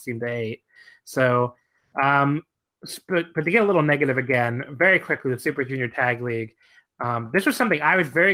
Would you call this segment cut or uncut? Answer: uncut